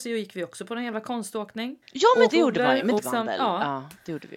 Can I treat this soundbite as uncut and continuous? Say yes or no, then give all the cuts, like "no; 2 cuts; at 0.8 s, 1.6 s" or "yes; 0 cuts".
no; 3 cuts; at 1.8 s, 2.3 s, 3.0 s